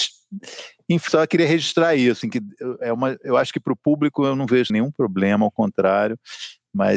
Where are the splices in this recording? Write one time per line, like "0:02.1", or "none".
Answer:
0:01.1
0:02.2
0:04.7